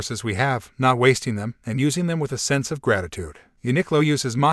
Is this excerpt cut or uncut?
uncut